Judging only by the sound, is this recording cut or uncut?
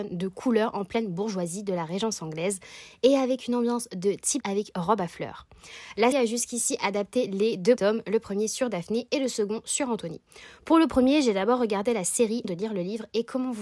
cut